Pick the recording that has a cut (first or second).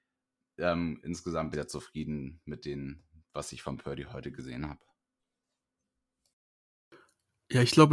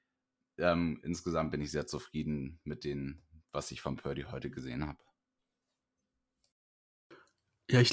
first